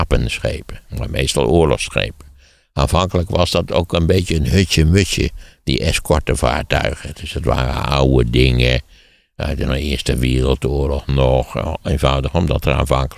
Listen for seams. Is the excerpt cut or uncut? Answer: uncut